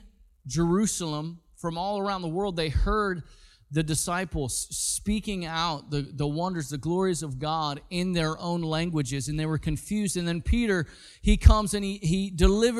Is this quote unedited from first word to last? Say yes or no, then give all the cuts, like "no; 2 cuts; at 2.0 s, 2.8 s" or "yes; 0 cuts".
yes; 0 cuts